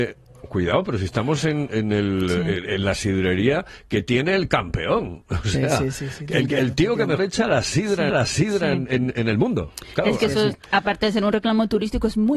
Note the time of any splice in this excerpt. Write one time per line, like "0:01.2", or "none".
0:01.7
0:07.2
0:08.1

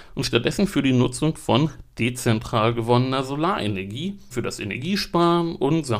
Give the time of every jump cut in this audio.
0:04.3

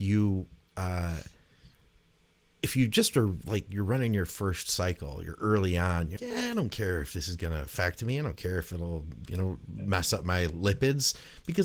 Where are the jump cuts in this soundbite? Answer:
0:06.2

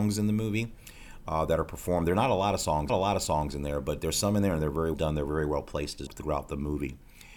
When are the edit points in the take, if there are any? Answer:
0:02.9
0:04.9
0:06.1

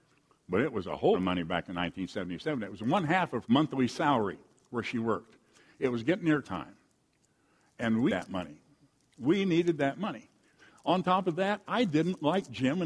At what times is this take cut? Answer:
0:01.1
0:03.4
0:06.4
0:08.1

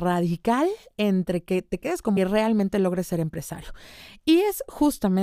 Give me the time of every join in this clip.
0:02.2

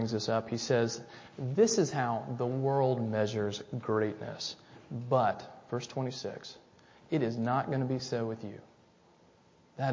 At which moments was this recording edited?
none

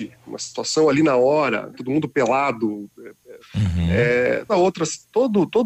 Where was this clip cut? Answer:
0:01.7
0:03.4
0:04.5

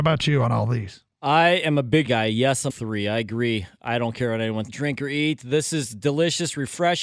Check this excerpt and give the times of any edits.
0:01.1
0:02.1
0:02.7
0:04.7

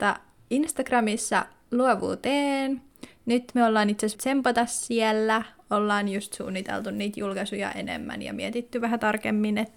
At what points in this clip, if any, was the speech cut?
0:04.1

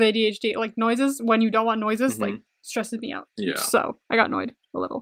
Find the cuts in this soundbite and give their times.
0:04.0

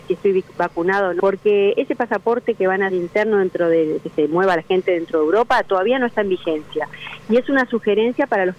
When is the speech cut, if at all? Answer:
0:01.2
0:02.9
0:04.0

